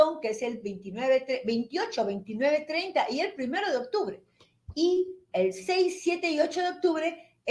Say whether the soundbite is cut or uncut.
uncut